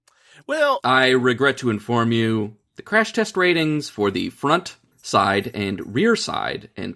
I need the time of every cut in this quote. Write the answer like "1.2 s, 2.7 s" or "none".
4.9 s